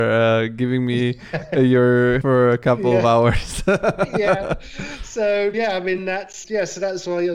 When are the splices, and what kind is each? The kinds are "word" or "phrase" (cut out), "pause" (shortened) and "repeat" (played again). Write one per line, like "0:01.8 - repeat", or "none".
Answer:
0:02.2 - word
0:05.5 - word
0:06.0 - word
0:06.4 - word